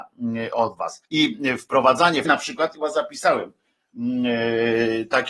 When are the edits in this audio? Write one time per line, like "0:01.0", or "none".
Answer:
0:01.1
0:02.2
0:02.7

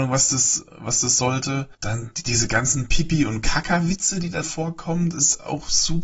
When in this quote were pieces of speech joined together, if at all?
0:01.7
0:04.4

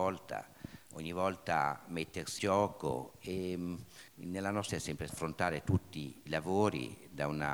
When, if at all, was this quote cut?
0:02.4
0:04.1
0:04.7
0:05.1
0:06.3

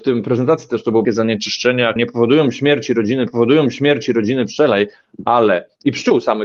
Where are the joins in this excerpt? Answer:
0:01.0
0:02.0
0:03.3

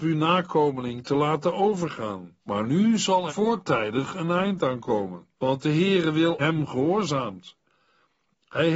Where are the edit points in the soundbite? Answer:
0:02.4
0:03.3
0:05.3
0:06.4

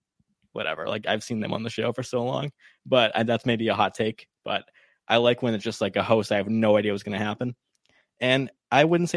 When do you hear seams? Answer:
none

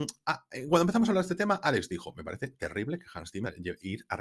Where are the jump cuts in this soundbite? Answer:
none

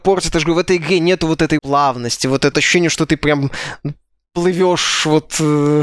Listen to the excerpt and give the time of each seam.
0:01.6
0:02.5

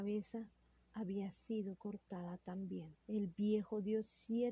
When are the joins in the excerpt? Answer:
0:03.0

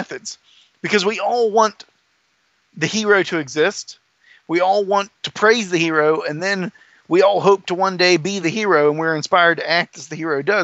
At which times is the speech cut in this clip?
none

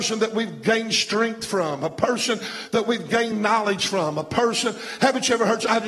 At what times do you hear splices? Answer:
none

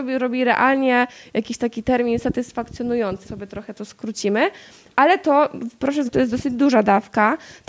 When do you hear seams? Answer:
0:03.2
0:06.1

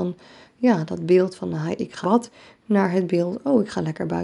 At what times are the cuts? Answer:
0:02.0

